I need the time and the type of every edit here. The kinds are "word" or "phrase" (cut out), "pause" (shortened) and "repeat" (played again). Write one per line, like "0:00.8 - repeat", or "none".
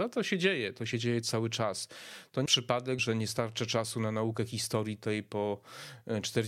0:02.5 - word
0:03.0 - word